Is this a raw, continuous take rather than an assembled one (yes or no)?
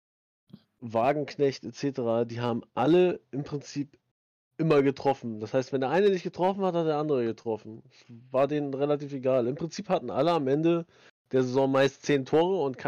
yes